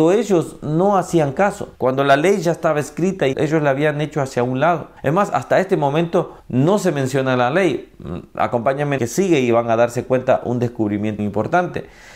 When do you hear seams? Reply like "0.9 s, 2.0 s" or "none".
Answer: 1.8 s, 3.3 s, 5.0 s, 6.4 s, 9.0 s, 11.2 s